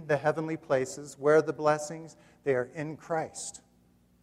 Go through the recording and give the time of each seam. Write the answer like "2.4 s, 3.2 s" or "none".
none